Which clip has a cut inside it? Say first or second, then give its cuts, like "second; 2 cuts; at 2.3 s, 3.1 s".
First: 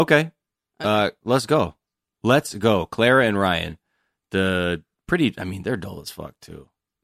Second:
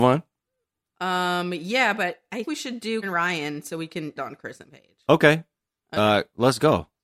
second; 3 cuts; at 2.4 s, 3.0 s, 4.2 s